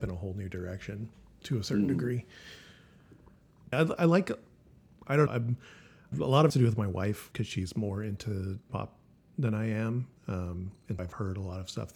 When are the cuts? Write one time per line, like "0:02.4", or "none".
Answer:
0:01.4
0:03.7
0:05.3
0:06.1
0:06.5
0:07.3
0:08.7
0:11.0